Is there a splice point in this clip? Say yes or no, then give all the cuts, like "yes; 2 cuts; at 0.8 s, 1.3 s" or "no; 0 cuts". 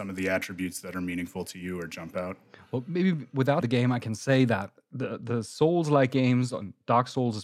yes; 1 cut; at 3.6 s